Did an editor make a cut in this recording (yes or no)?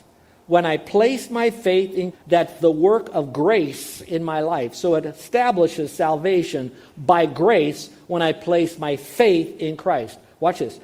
yes